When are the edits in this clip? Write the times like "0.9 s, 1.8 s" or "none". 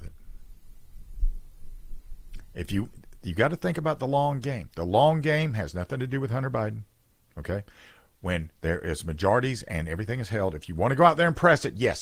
8.5 s